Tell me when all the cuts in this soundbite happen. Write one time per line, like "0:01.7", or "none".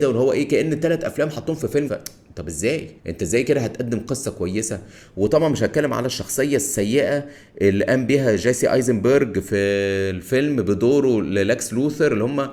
0:01.9
0:03.0